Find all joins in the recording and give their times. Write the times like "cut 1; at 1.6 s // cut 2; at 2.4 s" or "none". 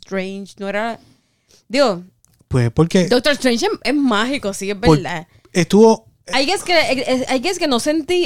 none